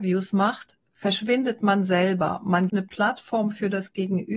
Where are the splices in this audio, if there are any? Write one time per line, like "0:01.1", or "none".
0:02.7